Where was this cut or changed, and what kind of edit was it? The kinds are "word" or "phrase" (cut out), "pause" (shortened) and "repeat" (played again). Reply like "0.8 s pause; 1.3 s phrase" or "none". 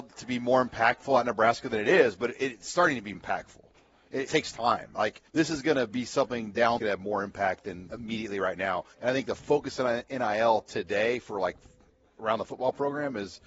3.1 s word; 4.3 s phrase; 5.3 s pause; 6.8 s phrase; 7.9 s word; 8.9 s pause